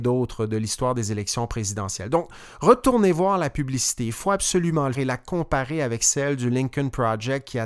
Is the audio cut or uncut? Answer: cut